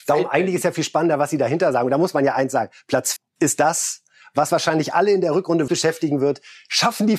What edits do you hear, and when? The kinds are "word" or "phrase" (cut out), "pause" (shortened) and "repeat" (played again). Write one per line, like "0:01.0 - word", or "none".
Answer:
0:03.2 - word
0:04.5 - word
0:05.7 - word